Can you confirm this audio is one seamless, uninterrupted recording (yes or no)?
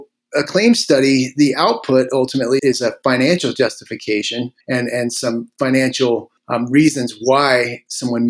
no